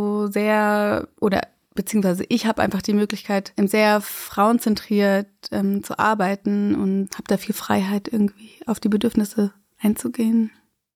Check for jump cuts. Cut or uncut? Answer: uncut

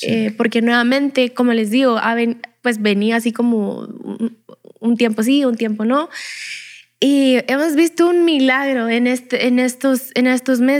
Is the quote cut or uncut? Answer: uncut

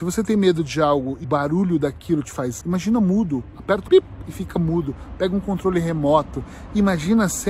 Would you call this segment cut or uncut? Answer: cut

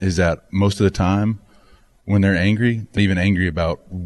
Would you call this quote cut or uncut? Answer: cut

